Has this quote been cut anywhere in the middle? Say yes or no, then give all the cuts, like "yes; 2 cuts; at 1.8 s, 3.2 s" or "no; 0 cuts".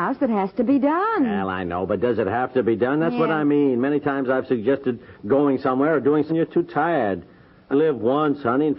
yes; 3 cuts; at 5.1 s, 6.3 s, 7.7 s